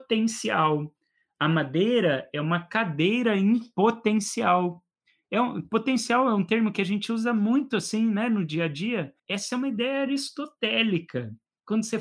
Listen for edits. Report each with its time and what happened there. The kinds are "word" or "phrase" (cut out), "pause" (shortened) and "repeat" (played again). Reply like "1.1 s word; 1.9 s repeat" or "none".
9.2 s pause

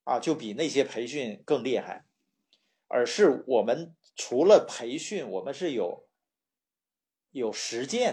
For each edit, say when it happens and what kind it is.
none

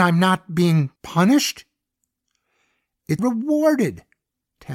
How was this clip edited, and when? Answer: 1.0 s pause; 3.2 s phrase

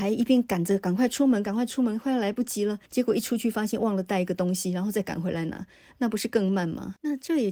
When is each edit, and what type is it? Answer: 2.9 s pause

